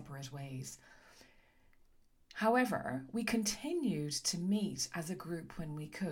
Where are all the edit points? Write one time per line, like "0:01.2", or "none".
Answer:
none

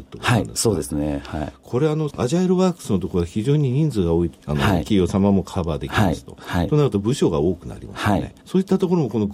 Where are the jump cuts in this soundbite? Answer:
0:02.1
0:04.4
0:08.4

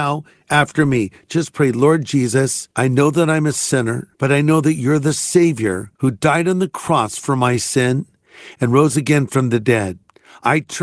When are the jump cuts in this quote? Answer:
0:02.7
0:04.1
0:05.9

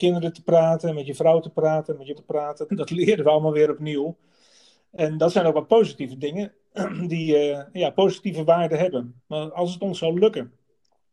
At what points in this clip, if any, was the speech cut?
0:02.1
0:02.7
0:09.2

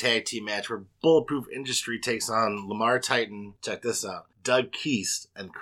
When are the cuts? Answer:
0:03.6
0:04.3

